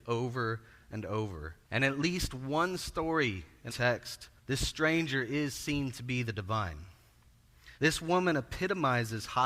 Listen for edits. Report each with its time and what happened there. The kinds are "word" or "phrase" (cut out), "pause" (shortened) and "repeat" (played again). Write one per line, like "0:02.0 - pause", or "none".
0:01.6 - pause
0:03.7 - word
0:04.4 - pause
0:07.7 - pause

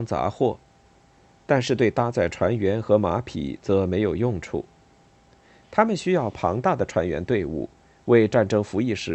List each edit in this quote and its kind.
none

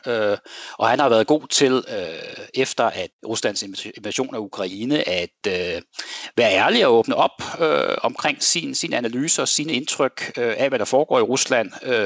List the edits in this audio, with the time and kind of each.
none

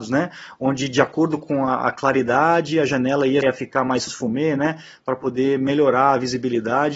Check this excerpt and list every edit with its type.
0:03.4 - phrase
0:04.1 - phrase

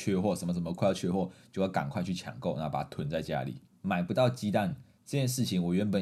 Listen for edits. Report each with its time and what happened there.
0:03.7 - pause

